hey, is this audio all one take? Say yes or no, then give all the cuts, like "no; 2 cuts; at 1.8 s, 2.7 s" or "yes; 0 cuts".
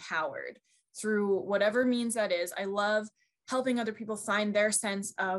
yes; 0 cuts